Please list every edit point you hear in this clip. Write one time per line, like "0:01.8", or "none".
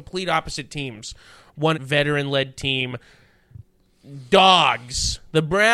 0:01.7